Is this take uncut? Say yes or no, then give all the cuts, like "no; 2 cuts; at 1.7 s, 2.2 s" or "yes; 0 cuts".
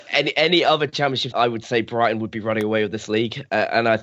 no; 1 cut; at 1.3 s